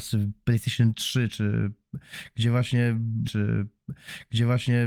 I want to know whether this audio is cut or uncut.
cut